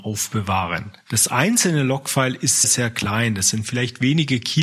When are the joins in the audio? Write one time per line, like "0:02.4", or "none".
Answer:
0:02.6